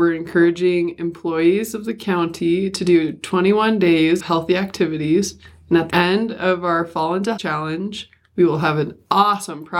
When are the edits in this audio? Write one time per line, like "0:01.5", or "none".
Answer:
0:04.2
0:05.9
0:07.4